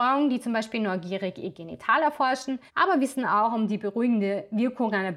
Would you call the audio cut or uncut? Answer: cut